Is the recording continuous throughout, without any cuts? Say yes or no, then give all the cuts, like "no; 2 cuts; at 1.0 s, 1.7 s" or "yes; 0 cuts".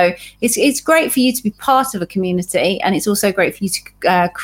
yes; 0 cuts